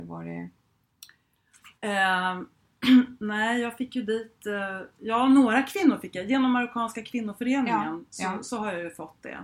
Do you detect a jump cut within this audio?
yes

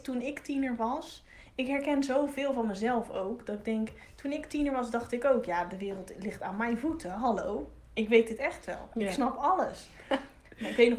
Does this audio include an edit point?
no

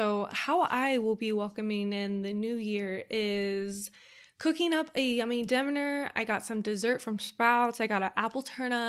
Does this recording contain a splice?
no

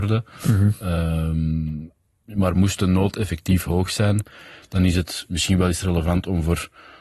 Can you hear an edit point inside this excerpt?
no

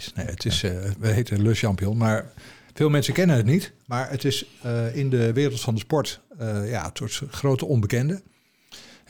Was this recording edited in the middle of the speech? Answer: no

